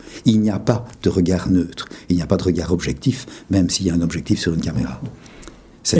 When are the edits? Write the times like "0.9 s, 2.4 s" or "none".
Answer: none